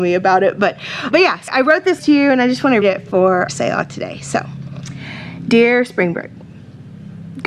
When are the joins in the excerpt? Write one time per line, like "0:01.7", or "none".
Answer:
0:01.1
0:01.5
0:02.0
0:02.8
0:03.5